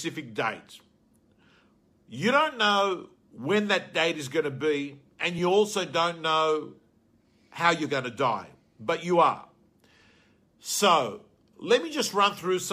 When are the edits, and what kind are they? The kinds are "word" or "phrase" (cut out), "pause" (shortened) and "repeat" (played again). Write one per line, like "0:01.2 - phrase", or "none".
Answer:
none